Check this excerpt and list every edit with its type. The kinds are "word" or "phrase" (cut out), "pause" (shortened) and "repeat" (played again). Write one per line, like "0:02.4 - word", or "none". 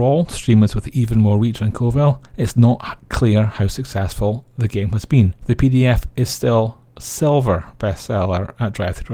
0:02.3 - pause
0:05.4 - pause